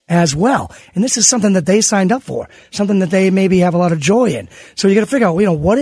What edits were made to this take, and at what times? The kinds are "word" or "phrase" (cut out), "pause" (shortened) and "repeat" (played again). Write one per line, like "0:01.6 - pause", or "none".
none